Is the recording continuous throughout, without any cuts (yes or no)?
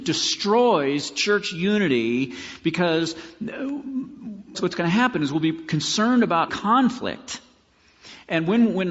no